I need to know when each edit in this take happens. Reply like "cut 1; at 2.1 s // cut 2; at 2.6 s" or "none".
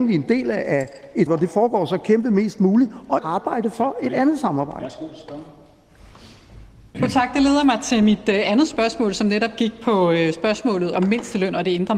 cut 1; at 1.3 s // cut 2; at 3.2 s // cut 3; at 10.9 s

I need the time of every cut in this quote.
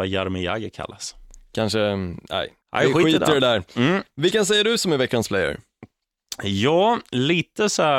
cut 1; at 2.6 s // cut 2; at 7.1 s

